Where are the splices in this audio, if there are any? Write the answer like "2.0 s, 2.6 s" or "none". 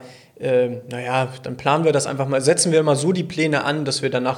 none